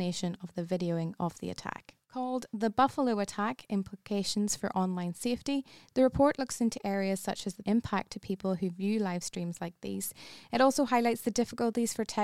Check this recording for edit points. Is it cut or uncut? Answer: cut